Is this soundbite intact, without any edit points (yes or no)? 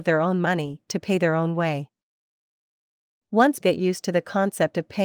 no